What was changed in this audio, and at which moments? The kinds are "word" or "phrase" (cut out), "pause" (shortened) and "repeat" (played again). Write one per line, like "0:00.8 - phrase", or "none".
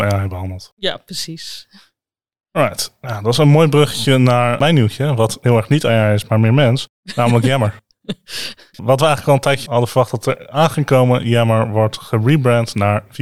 0:08.8 - word